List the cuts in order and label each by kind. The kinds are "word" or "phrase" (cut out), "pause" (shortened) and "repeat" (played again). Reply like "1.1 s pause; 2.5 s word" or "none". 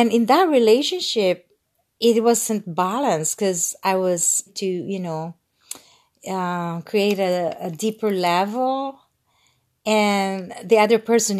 4.5 s phrase